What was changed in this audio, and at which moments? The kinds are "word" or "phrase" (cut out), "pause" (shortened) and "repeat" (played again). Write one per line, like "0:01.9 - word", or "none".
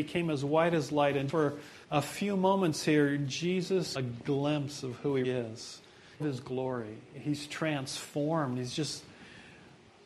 0:01.3 - word
0:01.8 - pause
0:03.9 - phrase
0:05.2 - word
0:06.2 - phrase